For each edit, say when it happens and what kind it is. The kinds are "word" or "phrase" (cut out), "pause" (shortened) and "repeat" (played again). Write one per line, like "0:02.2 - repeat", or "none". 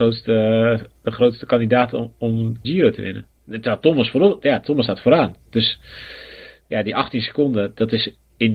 0:02.6 - phrase
0:03.3 - pause